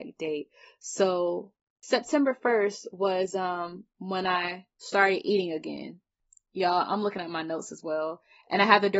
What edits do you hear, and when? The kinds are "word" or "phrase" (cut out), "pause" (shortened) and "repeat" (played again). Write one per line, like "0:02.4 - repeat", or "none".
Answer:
none